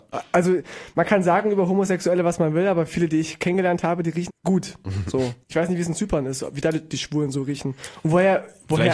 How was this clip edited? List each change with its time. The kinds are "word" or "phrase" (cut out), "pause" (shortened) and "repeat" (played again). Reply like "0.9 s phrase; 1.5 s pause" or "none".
4.3 s word; 5.4 s pause